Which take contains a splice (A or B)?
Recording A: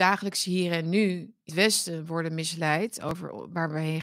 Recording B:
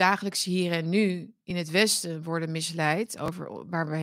A